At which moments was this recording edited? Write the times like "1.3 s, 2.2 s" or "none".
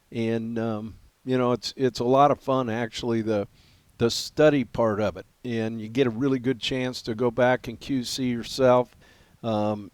none

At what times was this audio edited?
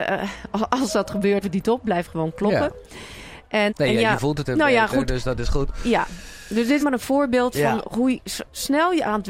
1.4 s, 3.7 s, 4.4 s, 6.8 s, 7.8 s

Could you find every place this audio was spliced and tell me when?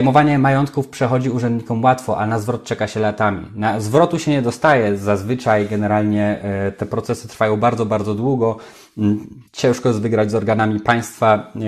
9.5 s

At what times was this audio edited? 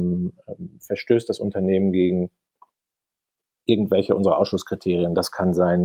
none

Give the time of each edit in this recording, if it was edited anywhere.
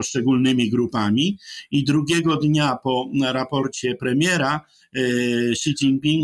none

